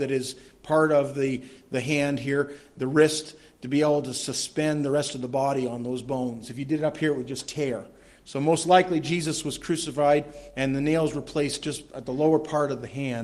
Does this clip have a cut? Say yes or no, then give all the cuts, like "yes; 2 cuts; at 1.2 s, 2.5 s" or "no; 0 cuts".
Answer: no; 0 cuts